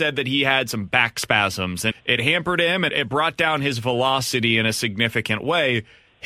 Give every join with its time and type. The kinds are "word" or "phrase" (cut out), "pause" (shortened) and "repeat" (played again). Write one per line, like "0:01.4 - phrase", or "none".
0:01.9 - word
0:02.9 - word